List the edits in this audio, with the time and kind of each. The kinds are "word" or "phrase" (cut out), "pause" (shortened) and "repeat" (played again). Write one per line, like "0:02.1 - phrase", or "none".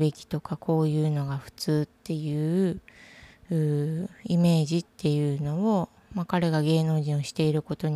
0:04.9 - pause

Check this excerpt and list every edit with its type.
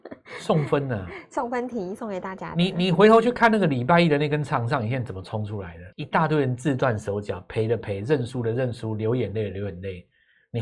0:05.9 - pause

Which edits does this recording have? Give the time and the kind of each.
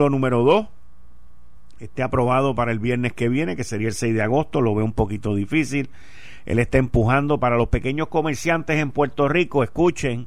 none

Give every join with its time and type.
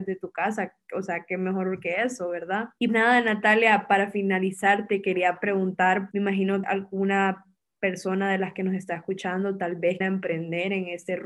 0:02.9 - word
0:06.1 - word
0:06.6 - word
0:10.0 - word

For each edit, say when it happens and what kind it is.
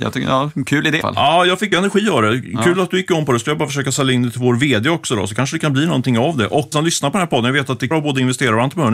0:01.0 - word
0:01.7 - word
0:06.7 - word
0:07.9 - word

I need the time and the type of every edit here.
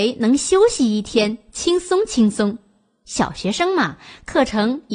none

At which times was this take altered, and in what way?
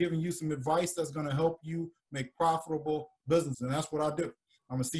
0:03.5 - word

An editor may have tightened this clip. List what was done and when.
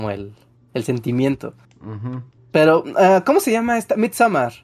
0:01.6 - pause
0:02.4 - pause

